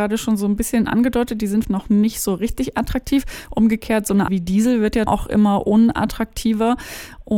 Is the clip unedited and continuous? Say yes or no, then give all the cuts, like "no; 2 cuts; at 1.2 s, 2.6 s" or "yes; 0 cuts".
no; 3 cuts; at 1.6 s, 4.3 s, 5.1 s